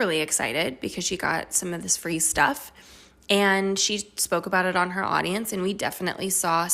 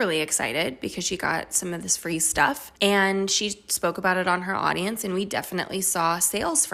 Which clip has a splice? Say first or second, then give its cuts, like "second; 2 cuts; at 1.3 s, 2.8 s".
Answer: second; 1 cut; at 2.8 s